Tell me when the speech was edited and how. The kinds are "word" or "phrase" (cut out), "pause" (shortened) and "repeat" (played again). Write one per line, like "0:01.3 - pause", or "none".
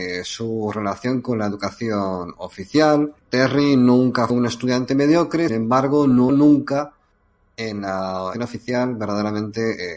0:03.2 - pause
0:04.3 - word
0:05.5 - word
0:06.3 - word
0:08.3 - word